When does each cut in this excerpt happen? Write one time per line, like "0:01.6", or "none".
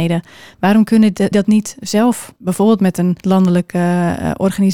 0:01.3
0:02.4
0:03.2